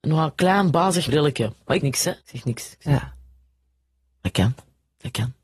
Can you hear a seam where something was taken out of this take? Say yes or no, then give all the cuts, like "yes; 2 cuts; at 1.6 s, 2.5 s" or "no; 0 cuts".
yes; 3 cuts; at 1.1 s, 1.8 s, 2.2 s